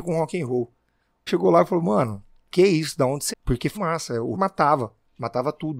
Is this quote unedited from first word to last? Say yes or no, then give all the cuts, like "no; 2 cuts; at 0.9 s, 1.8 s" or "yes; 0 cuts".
no; 5 cuts; at 1.3 s, 2.5 s, 3.3 s, 3.7 s, 4.3 s